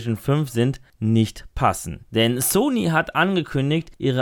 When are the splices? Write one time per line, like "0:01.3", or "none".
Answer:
none

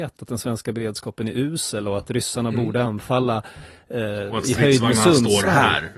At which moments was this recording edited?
none

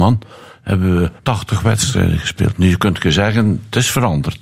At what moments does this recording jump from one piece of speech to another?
0:01.2

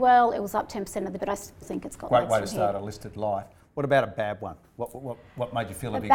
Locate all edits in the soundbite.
0:01.2
0:01.6

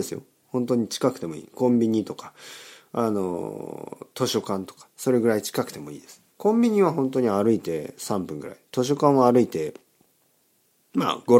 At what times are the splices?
0:04.9
0:06.3

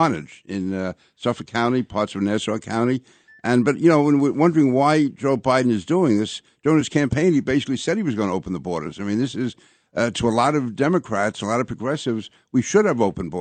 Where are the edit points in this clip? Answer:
none

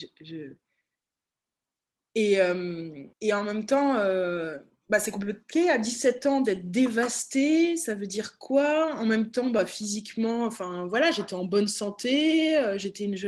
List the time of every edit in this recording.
0:03.1

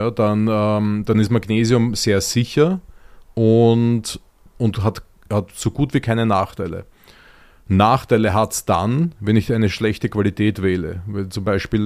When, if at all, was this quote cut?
none

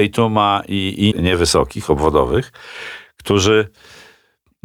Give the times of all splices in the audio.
0:01.1

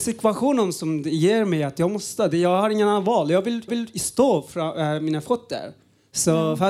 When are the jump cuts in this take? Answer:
0:03.7

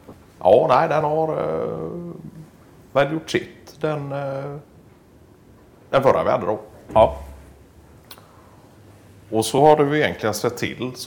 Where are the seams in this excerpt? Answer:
none

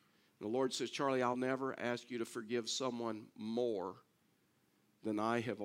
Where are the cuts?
0:01.3

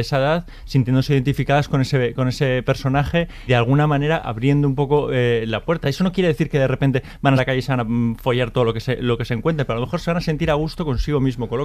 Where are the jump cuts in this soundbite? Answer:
0:03.5
0:07.4

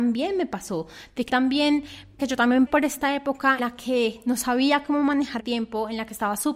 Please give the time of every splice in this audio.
0:01.3
0:02.2
0:02.7
0:03.6
0:05.4

